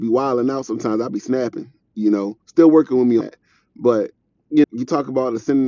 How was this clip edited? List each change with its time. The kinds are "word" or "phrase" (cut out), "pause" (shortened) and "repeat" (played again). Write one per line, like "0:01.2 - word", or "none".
0:02.4 - pause
0:03.2 - word
0:04.6 - word